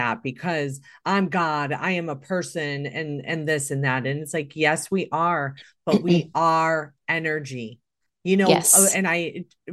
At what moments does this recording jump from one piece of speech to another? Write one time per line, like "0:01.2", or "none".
none